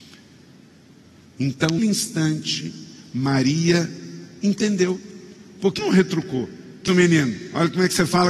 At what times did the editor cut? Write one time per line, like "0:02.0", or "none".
0:01.8
0:05.8
0:06.9

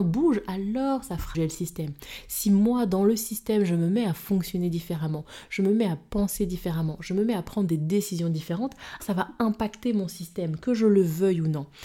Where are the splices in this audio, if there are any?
0:01.3
0:09.0

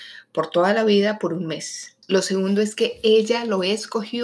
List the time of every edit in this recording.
0:02.0

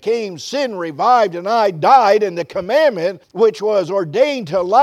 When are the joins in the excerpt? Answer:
0:03.2

